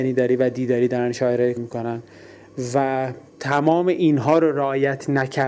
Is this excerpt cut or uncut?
cut